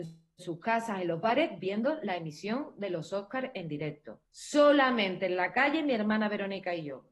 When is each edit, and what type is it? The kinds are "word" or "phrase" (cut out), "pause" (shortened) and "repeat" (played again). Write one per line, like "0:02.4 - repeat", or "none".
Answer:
0:04.3 - pause